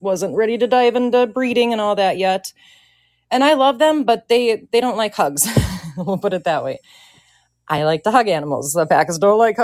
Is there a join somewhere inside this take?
no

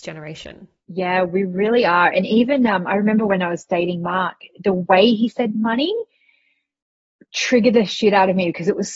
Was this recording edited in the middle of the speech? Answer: no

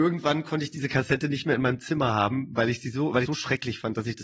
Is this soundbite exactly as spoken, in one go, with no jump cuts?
no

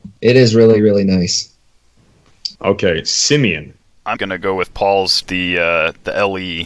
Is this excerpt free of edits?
no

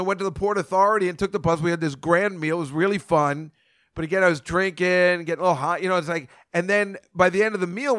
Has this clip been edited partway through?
no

